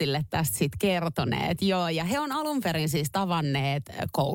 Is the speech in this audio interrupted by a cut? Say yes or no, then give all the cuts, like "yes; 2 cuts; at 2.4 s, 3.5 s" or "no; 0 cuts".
no; 0 cuts